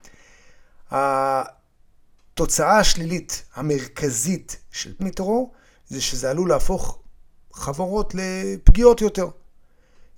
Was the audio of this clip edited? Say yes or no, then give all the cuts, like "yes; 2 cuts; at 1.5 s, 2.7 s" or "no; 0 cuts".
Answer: yes; 1 cut; at 5.0 s